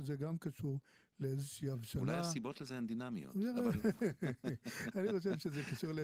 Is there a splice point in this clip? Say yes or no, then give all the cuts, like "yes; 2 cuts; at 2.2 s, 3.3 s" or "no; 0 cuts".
no; 0 cuts